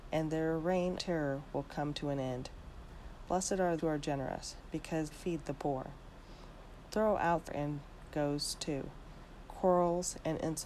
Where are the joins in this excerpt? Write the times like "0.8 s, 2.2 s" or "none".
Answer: 1.0 s, 3.8 s, 5.1 s, 7.5 s, 8.1 s